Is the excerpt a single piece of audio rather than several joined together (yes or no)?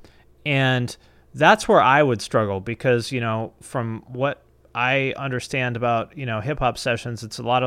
yes